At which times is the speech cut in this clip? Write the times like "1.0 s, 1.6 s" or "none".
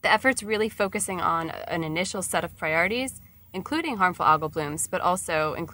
none